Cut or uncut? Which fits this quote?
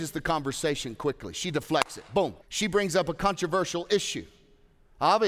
cut